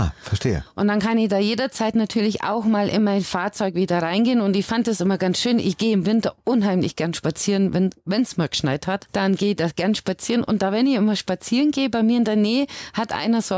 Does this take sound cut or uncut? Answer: uncut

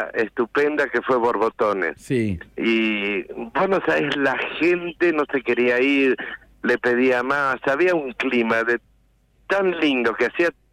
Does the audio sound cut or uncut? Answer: cut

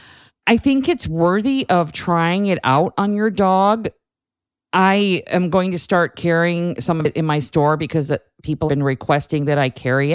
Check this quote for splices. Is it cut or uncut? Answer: cut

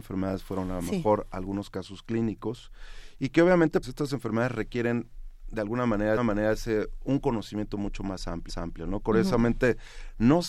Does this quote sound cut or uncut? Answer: cut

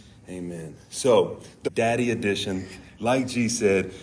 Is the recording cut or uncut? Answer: cut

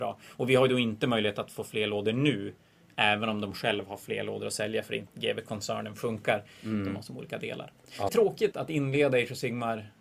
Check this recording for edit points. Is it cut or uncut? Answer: cut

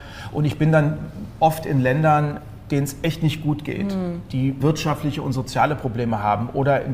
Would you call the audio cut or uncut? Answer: cut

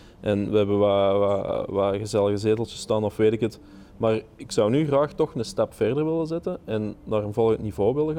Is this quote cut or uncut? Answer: uncut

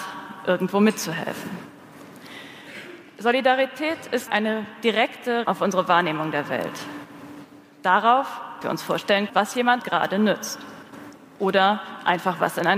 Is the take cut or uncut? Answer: cut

